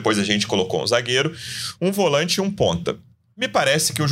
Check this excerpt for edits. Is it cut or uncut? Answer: uncut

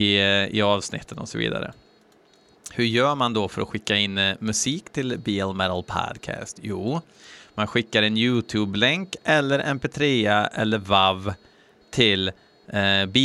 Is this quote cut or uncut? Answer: uncut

